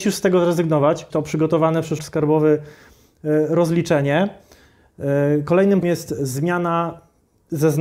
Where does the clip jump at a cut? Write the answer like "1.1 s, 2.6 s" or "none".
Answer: 1.1 s, 2.0 s, 5.8 s